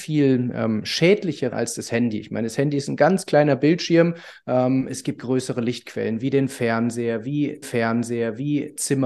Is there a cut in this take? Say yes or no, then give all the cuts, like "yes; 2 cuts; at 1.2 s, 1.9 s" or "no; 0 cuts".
yes; 3 cuts; at 1.5 s, 5.2 s, 7.6 s